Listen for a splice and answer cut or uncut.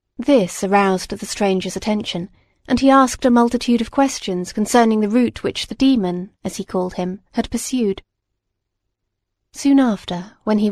uncut